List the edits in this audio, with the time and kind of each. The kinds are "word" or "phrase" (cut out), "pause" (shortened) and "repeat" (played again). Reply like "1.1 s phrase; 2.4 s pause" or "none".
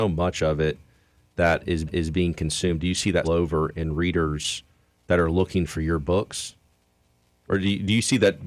1.9 s repeat; 3.2 s word